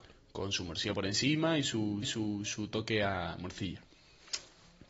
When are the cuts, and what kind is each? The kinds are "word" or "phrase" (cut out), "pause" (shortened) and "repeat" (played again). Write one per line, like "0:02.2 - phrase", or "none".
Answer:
0:02.0 - repeat